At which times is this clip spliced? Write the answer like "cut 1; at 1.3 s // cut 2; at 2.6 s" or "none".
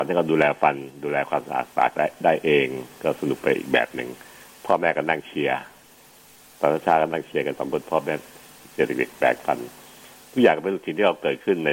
cut 1; at 1.7 s